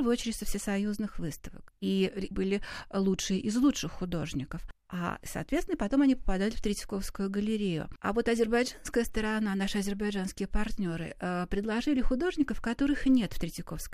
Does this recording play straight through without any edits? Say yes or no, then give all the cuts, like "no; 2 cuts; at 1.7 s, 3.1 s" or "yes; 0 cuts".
no; 1 cut; at 2.3 s